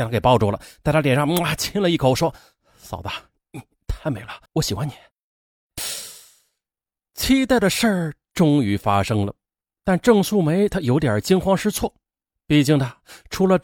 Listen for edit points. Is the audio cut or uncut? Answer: cut